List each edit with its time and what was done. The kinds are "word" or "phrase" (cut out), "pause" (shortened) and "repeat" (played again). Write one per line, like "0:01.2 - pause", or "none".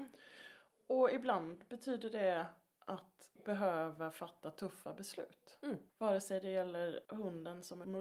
0:03.3 - pause
0:05.9 - pause
0:07.0 - pause